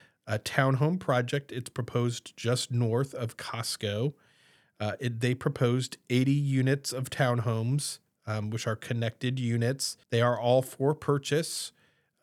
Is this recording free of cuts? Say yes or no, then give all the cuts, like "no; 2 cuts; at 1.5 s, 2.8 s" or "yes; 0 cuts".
no; 1 cut; at 10.0 s